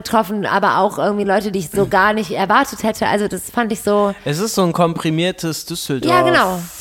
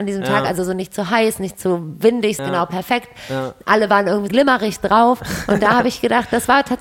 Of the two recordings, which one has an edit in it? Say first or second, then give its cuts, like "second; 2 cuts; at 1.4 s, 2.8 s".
second; 2 cuts; at 2.4 s, 4.3 s